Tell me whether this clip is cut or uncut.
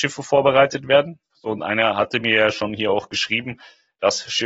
cut